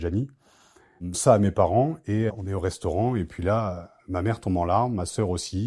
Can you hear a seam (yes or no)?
yes